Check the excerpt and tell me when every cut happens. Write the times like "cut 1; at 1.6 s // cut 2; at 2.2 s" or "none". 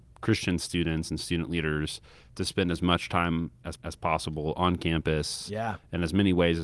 cut 1; at 3.8 s